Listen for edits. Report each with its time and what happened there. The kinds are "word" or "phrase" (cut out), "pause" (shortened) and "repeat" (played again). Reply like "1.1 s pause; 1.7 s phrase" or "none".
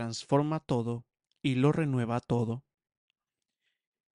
none